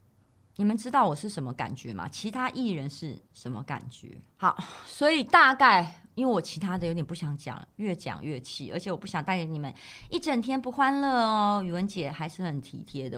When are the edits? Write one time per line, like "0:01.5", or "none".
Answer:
0:03.3
0:04.3